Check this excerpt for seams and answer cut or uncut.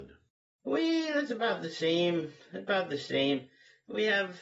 uncut